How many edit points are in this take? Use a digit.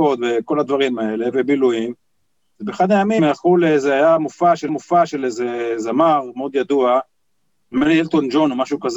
2